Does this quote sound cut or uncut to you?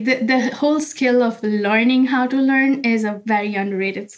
uncut